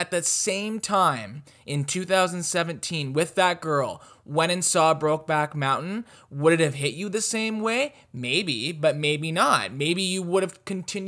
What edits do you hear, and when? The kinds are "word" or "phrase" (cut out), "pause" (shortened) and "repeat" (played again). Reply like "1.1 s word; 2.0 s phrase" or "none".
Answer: none